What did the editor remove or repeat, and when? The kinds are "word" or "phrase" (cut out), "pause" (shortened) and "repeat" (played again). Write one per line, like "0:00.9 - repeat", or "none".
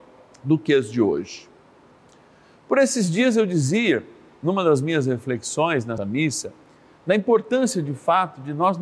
0:06.0 - word